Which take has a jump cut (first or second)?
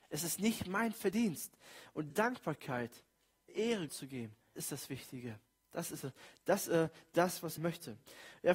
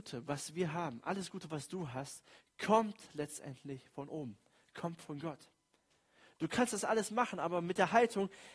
first